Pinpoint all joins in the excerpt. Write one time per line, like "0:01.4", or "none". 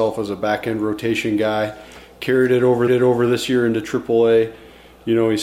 0:02.9